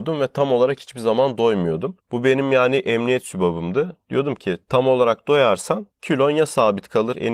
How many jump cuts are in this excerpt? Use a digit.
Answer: 0